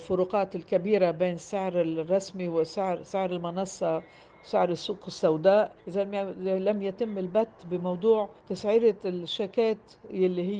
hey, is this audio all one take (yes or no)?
no